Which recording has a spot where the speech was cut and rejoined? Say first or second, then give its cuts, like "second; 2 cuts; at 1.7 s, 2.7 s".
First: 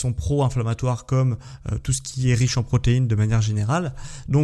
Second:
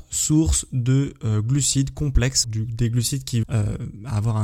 second; 2 cuts; at 2.4 s, 3.4 s